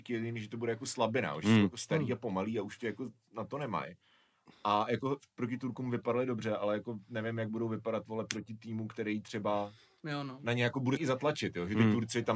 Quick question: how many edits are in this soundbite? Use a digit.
2